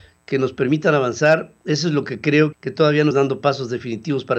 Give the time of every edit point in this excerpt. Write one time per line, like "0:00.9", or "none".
0:02.5
0:03.1